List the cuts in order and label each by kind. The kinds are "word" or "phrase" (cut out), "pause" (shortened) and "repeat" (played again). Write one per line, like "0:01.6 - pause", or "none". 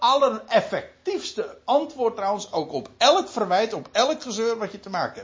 none